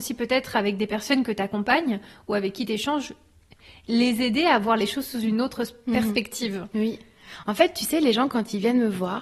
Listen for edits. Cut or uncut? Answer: uncut